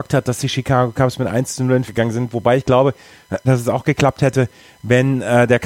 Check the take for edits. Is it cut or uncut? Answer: cut